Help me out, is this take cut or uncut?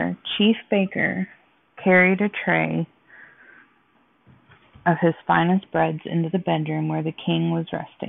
uncut